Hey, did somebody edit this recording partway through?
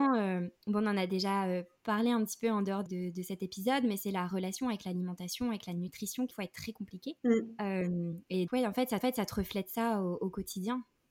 yes; 5 cuts; at 2.9 s, 6.3 s, 7.2 s, 8.5 s, 9.0 s

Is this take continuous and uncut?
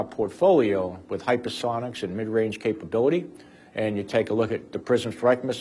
yes; 0 cuts

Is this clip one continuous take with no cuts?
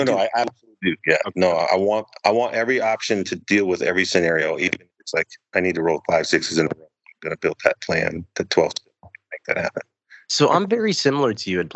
yes; 0 cuts

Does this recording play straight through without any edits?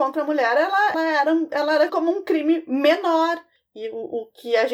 no; 2 cuts; at 0.9 s, 1.9 s

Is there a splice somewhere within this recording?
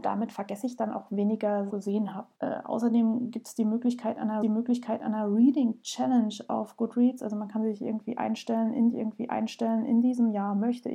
yes; 4 cuts; at 1.7 s, 2.3 s, 4.4 s, 8.9 s

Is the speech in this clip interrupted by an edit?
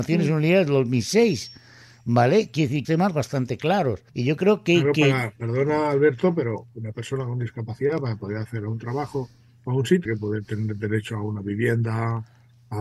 yes; 3 cuts; at 2.8 s, 4.1 s, 10.1 s

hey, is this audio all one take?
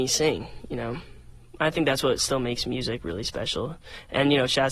yes; 0 cuts

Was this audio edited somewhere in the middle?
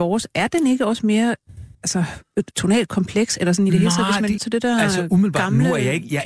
yes; 3 cuts; at 1.7 s, 2.5 s, 4.4 s

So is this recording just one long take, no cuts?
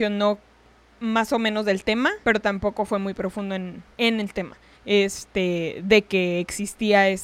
no; 3 cuts; at 2.2 s, 3.9 s, 4.7 s

